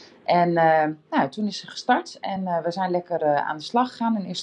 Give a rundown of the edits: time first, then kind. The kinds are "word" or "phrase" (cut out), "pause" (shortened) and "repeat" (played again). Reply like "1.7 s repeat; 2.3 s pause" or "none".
none